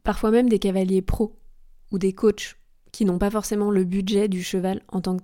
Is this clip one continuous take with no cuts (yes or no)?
yes